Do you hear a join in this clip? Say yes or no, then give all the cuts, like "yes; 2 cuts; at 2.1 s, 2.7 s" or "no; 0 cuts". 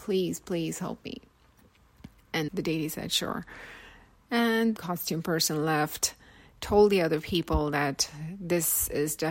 yes; 2 cuts; at 2.5 s, 4.8 s